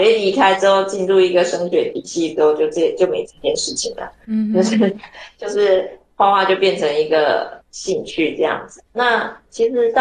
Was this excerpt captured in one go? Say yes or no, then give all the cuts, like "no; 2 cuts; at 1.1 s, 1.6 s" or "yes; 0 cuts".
no; 2 cuts; at 7.6 s, 8.9 s